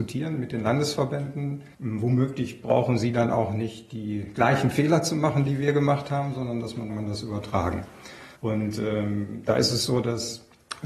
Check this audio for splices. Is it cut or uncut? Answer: cut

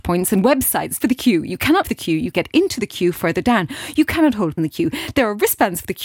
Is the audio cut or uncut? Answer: cut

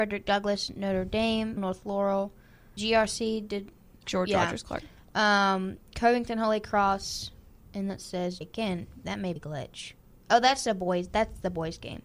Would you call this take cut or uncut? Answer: cut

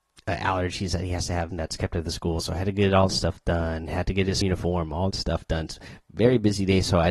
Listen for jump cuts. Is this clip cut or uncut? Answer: cut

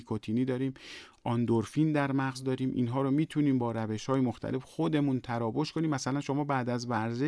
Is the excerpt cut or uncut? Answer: uncut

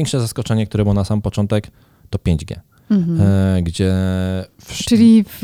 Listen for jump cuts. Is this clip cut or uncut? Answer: uncut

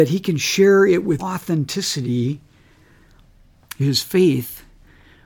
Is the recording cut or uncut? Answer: cut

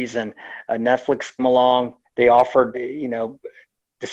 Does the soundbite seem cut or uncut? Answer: cut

